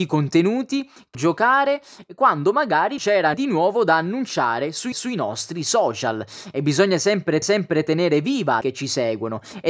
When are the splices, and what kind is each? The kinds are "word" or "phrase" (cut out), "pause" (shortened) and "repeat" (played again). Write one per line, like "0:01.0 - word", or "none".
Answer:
0:01.1 - phrase
0:03.0 - word
0:03.3 - word
0:04.9 - repeat
0:07.4 - repeat
0:08.6 - phrase